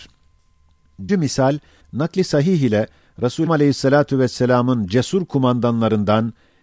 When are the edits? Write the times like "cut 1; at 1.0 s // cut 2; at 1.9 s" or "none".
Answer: cut 1; at 1.1 s // cut 2; at 1.8 s // cut 3; at 3.5 s